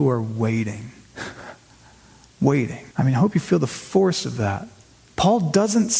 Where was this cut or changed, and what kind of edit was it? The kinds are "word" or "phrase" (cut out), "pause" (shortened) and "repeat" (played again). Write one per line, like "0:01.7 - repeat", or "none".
0:02.9 - pause
0:04.8 - pause